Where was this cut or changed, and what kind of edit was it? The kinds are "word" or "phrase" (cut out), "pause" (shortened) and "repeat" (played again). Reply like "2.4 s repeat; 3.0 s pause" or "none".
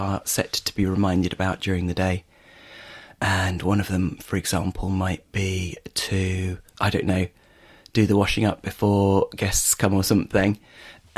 none